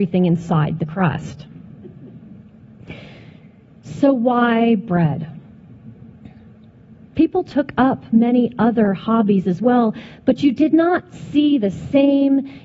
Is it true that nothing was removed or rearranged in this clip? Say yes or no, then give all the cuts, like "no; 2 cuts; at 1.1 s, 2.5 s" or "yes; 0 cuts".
yes; 0 cuts